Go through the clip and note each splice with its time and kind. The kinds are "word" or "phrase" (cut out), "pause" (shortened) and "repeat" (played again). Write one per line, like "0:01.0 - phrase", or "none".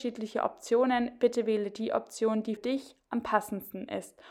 0:02.6 - word